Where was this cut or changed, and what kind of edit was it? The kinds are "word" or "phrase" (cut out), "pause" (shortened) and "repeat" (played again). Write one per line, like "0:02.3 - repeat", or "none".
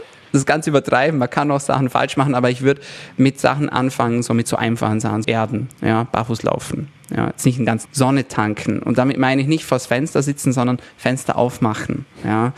0:05.2 - word
0:07.9 - word